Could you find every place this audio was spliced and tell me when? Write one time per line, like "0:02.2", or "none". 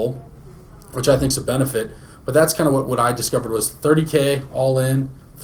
none